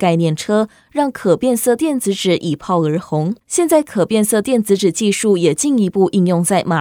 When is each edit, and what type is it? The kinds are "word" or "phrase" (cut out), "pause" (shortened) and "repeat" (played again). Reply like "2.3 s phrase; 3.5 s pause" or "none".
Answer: 3.4 s pause